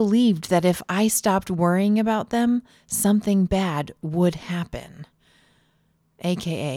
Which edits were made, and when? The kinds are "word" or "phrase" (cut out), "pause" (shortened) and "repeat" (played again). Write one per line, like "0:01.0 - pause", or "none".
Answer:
none